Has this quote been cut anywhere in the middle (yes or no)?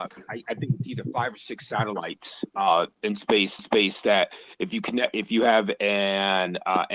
yes